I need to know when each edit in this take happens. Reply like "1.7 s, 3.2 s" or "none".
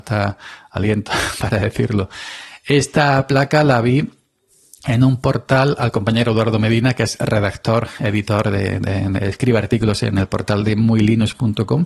none